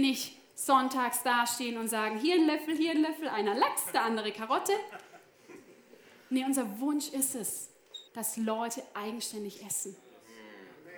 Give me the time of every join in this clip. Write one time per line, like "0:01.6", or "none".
0:08.1